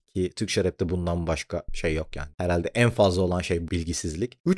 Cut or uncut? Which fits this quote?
cut